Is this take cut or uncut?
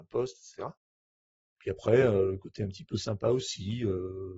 uncut